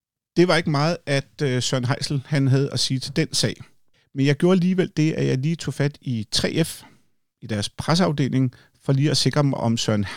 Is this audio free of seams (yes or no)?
no